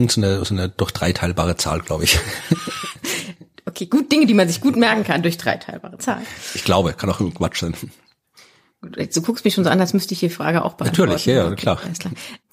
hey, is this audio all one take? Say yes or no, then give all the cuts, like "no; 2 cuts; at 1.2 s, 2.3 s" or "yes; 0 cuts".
yes; 0 cuts